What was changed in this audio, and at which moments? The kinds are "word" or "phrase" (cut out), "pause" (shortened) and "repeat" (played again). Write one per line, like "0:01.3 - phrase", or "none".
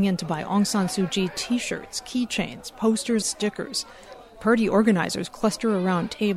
0:03.2 - word